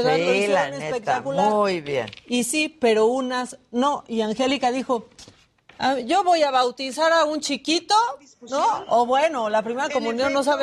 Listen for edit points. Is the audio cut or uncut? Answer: uncut